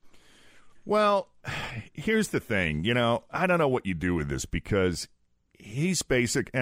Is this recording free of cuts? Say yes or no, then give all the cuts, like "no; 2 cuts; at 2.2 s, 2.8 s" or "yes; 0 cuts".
yes; 0 cuts